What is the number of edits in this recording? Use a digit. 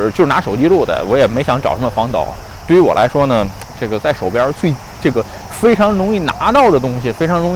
1